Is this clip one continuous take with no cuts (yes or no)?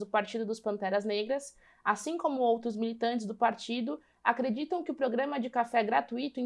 yes